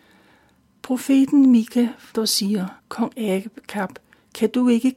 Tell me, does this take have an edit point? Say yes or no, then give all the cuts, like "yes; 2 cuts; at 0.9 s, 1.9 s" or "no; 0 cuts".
yes; 2 cuts; at 2.1 s, 2.8 s